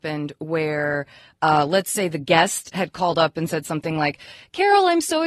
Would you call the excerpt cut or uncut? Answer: uncut